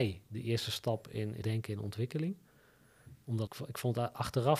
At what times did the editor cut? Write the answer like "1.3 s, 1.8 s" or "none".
1.4 s, 3.5 s